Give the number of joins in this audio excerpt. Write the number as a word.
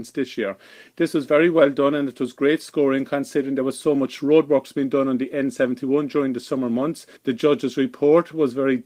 one